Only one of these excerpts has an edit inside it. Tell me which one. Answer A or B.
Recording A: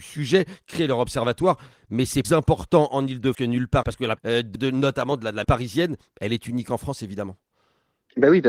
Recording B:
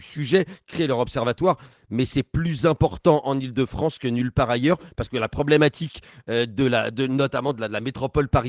A